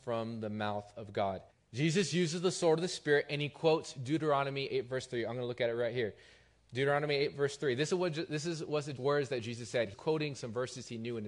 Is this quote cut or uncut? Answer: cut